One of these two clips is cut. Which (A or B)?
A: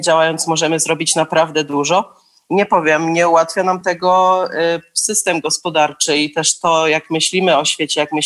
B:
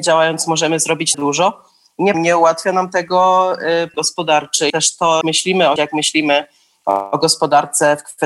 B